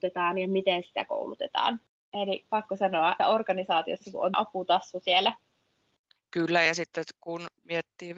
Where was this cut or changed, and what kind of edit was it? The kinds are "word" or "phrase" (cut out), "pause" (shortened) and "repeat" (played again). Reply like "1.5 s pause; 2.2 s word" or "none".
2.4 s word; 3.2 s word; 4.3 s word

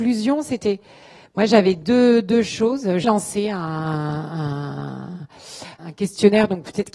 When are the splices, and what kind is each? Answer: 3.0 s word; 5.8 s word

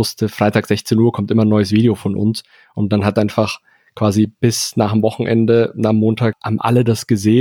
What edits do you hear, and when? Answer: none

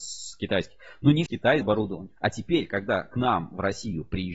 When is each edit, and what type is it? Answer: 1.3 s phrase; 1.6 s word; 2.2 s pause

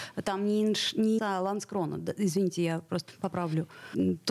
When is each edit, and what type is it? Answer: 1.2 s phrase

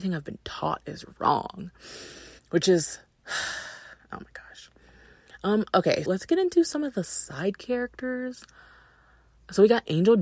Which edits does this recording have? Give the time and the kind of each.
2.4 s pause; 6.0 s word

